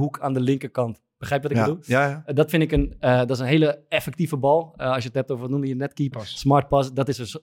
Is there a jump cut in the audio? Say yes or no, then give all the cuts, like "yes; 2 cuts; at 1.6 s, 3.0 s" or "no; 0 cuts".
yes; 1 cut; at 6.1 s